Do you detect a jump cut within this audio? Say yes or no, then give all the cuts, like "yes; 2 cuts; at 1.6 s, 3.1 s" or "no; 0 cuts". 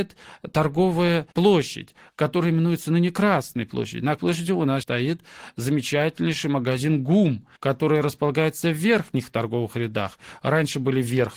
yes; 4 cuts; at 1.3 s, 4.2 s, 4.8 s, 7.6 s